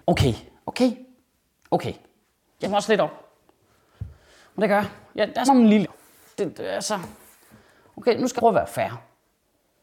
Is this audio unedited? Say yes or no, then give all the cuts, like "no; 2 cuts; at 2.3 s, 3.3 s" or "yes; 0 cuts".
no; 4 cuts; at 2.6 s, 5.5 s, 5.8 s, 8.4 s